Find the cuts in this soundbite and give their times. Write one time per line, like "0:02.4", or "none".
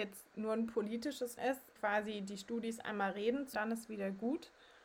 0:01.4
0:01.8
0:03.5

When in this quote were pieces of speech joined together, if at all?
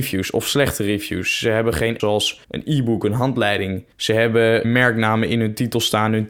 0:02.0
0:02.4
0:03.9
0:04.6

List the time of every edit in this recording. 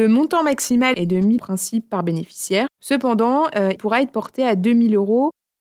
0:00.9
0:01.4
0:02.7
0:03.8

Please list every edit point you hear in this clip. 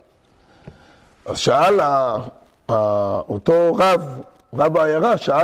none

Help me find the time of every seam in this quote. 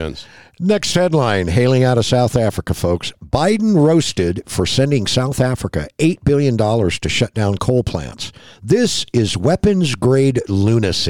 none

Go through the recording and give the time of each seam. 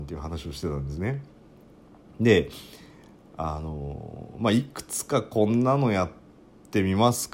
none

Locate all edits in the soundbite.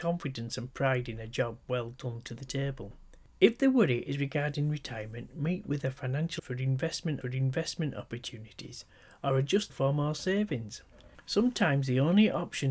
0:06.4
0:07.2
0:09.7

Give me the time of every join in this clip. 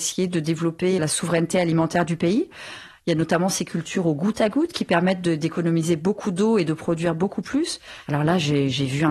0:01.0

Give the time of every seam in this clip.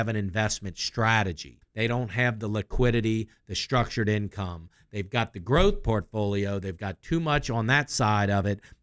0:01.6

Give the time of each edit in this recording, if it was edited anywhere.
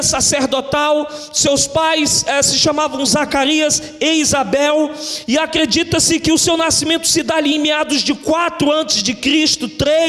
none

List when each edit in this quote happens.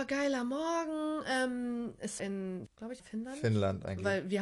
0:02.2
0:02.7
0:03.0

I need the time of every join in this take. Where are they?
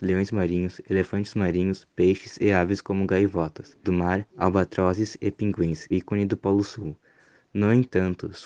0:03.8
0:04.3
0:05.9

